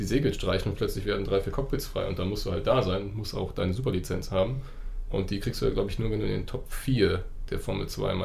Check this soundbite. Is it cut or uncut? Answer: uncut